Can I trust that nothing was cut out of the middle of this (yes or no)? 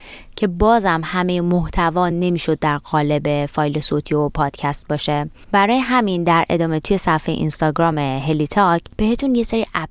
yes